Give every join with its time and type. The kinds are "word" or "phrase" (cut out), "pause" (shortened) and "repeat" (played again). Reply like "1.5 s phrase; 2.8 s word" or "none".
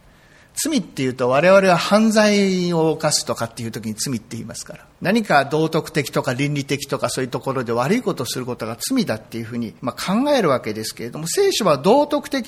4.9 s pause; 9.8 s pause